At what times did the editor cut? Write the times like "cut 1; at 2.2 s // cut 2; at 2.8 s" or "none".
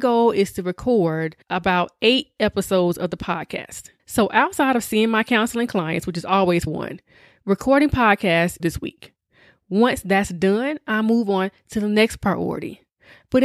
cut 1; at 1.4 s // cut 2; at 4.0 s // cut 3; at 6.7 s // cut 4; at 8.6 s